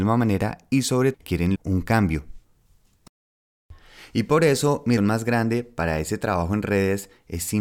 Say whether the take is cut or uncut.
cut